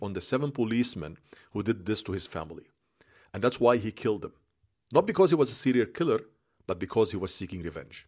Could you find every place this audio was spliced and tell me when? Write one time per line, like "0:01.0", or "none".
none